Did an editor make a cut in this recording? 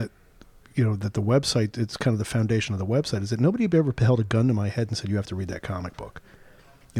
no; 0 cuts

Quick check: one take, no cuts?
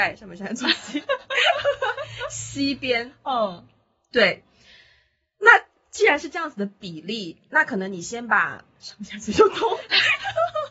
yes; 0 cuts

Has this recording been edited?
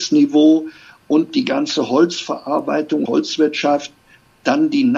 yes; 1 cut; at 3.0 s

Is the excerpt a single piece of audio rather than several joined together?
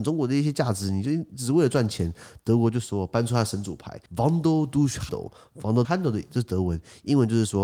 no; 3 cuts; at 4.1 s, 5.1 s, 5.8 s

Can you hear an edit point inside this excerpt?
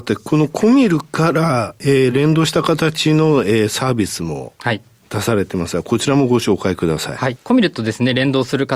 no; 0 cuts

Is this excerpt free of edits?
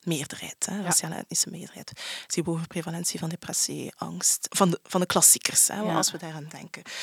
no; 1 cut; at 2.4 s

